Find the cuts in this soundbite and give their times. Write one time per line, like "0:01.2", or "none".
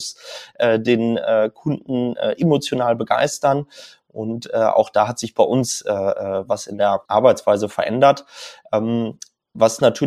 0:07.0